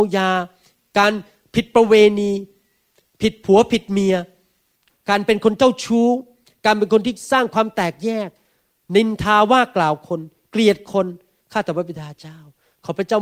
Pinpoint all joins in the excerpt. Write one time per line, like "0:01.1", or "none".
none